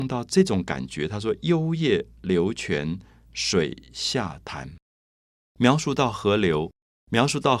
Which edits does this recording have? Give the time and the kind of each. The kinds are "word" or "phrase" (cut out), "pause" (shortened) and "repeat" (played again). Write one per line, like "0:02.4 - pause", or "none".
0:04.8 - pause